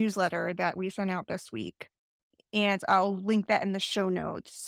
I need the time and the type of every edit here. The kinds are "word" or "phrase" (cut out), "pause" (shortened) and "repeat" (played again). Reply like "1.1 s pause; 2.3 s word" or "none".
none